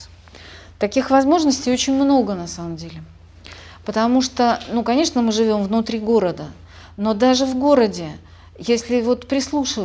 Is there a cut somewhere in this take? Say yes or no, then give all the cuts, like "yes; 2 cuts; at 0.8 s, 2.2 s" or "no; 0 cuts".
no; 0 cuts